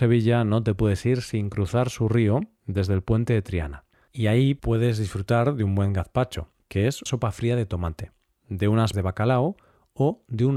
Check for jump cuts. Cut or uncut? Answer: cut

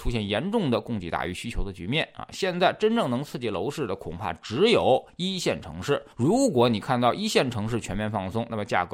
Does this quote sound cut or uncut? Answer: cut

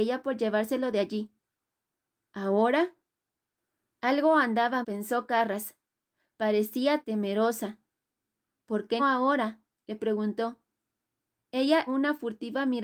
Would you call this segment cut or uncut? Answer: cut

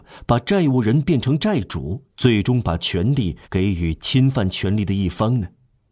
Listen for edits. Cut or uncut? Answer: cut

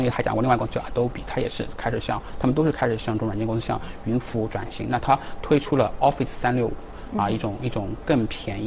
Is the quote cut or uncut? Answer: uncut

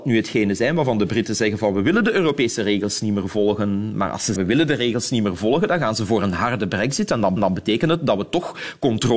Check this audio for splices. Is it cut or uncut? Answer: cut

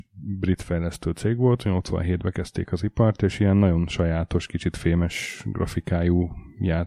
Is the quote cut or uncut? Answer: uncut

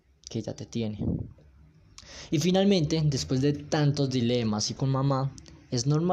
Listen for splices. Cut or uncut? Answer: cut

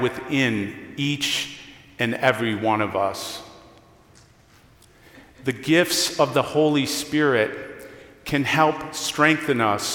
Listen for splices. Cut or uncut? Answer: uncut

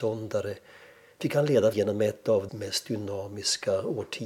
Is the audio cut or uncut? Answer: cut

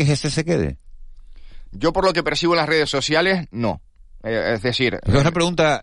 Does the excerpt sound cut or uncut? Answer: uncut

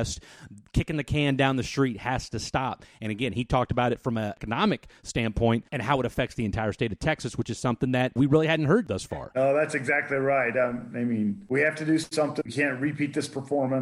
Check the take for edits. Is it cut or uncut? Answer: uncut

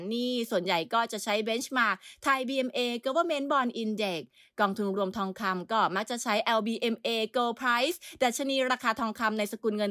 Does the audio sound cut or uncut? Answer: uncut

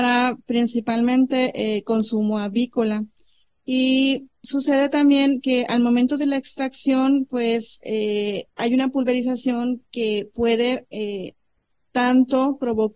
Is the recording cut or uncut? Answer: cut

